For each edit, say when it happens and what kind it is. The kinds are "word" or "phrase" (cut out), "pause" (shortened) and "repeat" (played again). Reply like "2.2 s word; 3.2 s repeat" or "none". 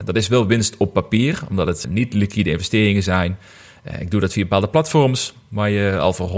1.8 s word